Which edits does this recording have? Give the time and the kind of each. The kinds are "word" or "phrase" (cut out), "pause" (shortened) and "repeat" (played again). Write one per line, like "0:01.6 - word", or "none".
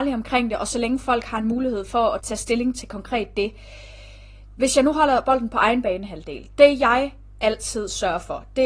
0:02.2 - word